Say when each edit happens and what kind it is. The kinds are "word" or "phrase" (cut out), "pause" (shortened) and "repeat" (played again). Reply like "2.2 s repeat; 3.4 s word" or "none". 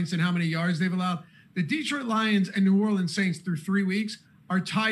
none